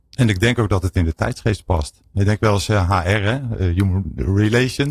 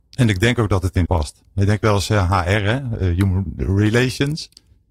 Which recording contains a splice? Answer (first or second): second